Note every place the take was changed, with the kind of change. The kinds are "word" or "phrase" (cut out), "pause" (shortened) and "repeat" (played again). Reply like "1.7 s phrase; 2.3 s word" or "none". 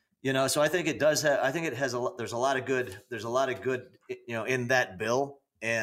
none